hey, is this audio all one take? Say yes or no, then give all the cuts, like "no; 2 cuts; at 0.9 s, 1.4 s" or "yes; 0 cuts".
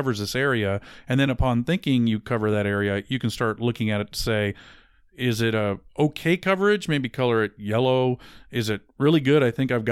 yes; 0 cuts